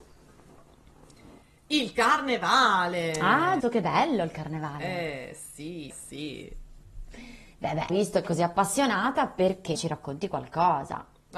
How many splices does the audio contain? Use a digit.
5